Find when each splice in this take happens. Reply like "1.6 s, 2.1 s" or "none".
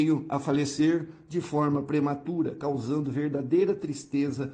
none